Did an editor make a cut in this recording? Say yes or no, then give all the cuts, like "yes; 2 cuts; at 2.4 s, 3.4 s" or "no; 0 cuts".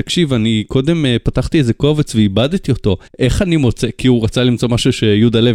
yes; 1 cut; at 3.1 s